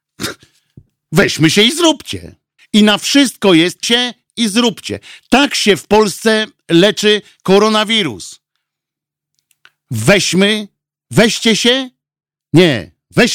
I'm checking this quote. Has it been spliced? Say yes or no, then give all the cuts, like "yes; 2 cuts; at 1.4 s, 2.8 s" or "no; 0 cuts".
yes; 2 cuts; at 2.6 s, 3.8 s